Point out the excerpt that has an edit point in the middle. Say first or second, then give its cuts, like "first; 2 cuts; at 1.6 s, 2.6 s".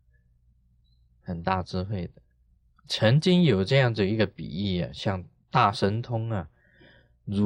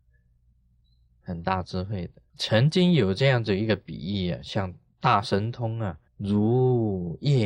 second; 2 cuts; at 2.3 s, 6.1 s